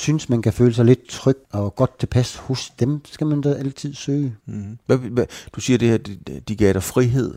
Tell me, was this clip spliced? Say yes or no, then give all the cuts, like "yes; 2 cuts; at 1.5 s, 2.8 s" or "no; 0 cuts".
yes; 3 cuts; at 1.4 s, 4.4 s, 4.8 s